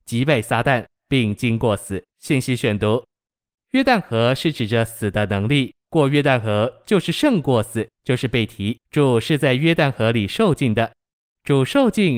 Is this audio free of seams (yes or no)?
no